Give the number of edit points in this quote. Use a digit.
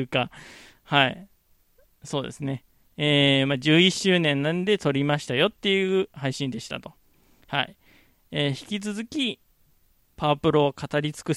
0